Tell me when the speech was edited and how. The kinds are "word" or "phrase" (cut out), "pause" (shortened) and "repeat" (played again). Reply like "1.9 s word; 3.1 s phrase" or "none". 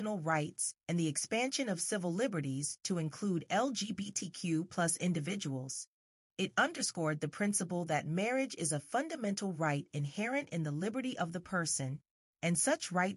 6.2 s pause